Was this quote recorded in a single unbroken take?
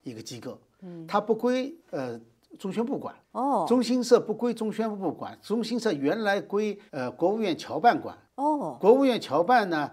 no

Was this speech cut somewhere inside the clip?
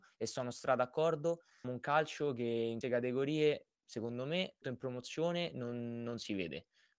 yes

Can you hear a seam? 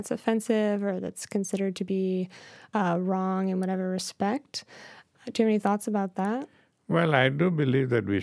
no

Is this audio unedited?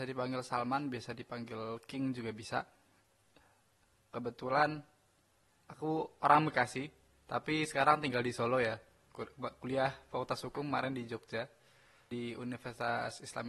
yes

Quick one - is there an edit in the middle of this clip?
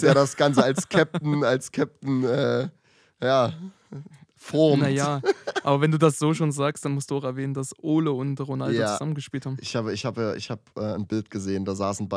no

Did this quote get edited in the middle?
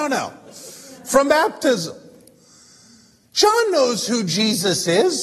no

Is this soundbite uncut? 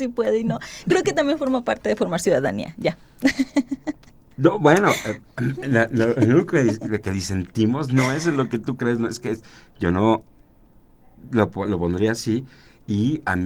yes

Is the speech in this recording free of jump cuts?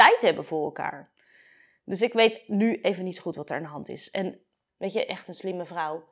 no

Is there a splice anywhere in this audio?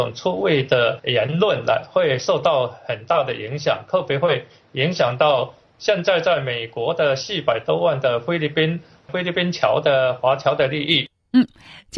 no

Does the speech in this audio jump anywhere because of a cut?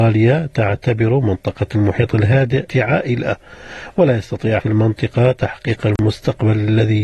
yes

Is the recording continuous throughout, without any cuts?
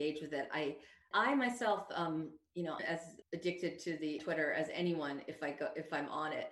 no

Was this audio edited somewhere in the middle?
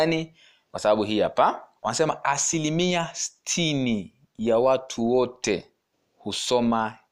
yes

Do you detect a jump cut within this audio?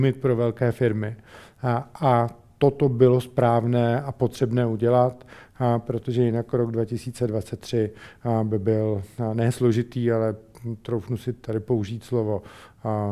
no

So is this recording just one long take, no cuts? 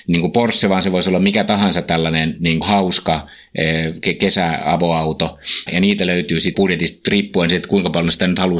no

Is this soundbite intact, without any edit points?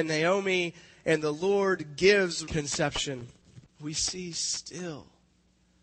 no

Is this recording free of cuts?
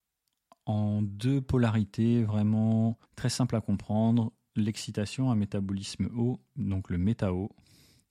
no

